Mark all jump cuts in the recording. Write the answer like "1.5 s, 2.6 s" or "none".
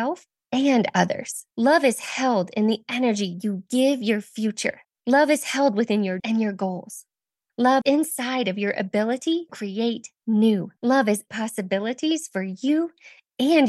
1.5 s, 4.8 s, 6.2 s, 7.8 s, 9.5 s, 10.8 s, 11.3 s